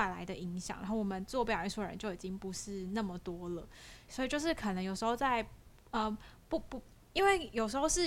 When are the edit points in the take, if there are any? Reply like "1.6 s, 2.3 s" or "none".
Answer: 4.1 s